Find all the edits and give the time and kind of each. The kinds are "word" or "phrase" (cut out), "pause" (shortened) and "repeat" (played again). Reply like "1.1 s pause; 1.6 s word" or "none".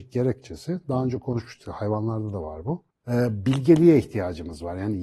2.9 s pause